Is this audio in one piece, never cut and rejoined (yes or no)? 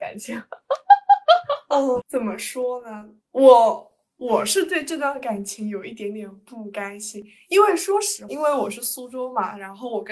no